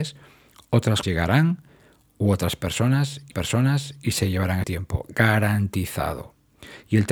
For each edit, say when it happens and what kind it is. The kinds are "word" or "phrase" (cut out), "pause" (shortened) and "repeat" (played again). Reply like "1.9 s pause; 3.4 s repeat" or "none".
1.0 s word; 3.3 s repeat; 4.6 s word